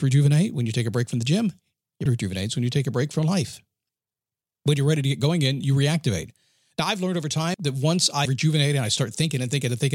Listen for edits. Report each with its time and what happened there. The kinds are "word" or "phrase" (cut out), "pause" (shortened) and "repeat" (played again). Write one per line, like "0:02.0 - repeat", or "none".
0:02.1 - word
0:04.0 - pause
0:07.5 - word
0:08.3 - word